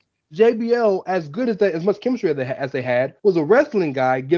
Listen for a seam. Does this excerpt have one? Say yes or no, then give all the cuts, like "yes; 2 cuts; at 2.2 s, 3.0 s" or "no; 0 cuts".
yes; 1 cut; at 3.2 s